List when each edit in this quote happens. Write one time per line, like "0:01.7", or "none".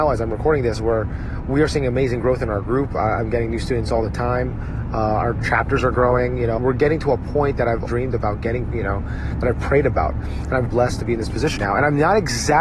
0:06.6
0:07.9
0:08.7
0:10.7
0:11.6